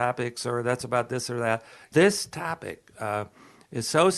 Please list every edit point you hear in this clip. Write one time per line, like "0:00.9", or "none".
0:01.9

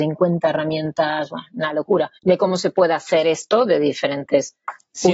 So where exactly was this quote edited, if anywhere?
0:02.1

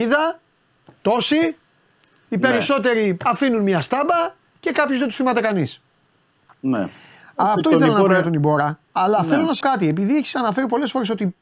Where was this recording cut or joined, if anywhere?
0:08.8
0:09.6

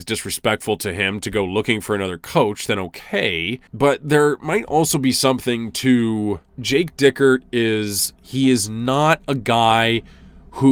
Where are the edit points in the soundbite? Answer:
0:03.7
0:06.5

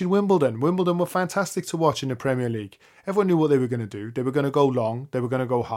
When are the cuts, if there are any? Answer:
none

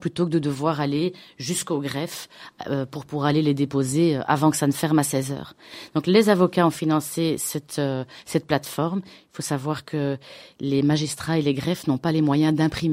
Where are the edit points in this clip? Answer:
none

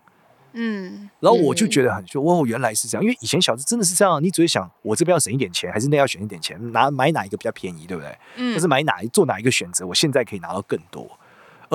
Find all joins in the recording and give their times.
0:02.1

